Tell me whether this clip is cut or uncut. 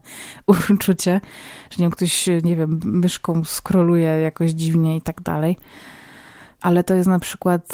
uncut